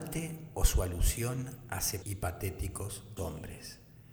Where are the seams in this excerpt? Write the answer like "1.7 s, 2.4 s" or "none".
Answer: 2.0 s, 3.2 s